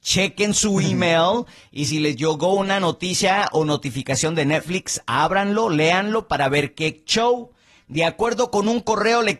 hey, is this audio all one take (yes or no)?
yes